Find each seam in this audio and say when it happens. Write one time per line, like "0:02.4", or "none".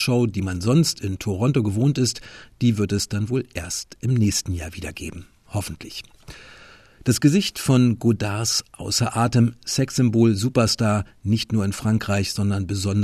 none